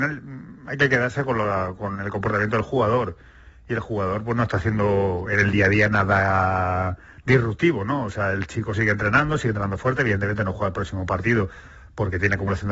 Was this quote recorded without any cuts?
yes; 0 cuts

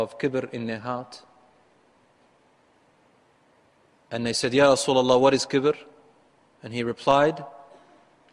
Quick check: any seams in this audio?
no; 0 cuts

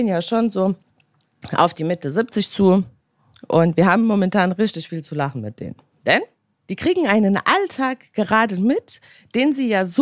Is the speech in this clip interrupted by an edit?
no; 0 cuts

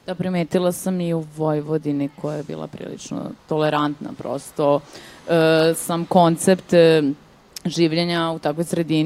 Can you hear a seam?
no; 0 cuts

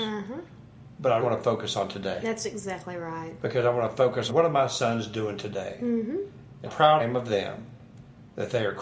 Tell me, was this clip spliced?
yes; 4 cuts; at 1.2 s, 4.3 s, 6.7 s, 7.0 s

